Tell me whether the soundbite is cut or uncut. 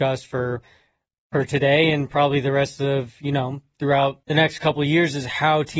cut